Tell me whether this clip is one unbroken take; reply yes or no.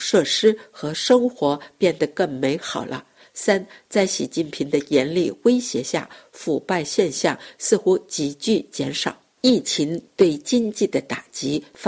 yes